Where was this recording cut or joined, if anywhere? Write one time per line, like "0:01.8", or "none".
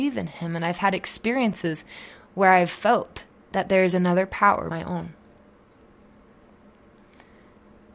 0:03.3
0:04.7